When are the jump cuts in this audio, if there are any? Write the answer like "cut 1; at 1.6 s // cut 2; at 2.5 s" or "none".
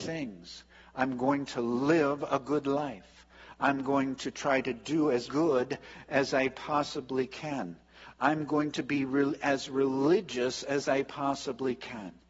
cut 1; at 5.3 s